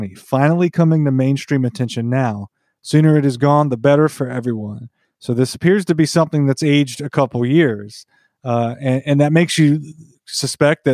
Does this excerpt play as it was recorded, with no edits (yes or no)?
yes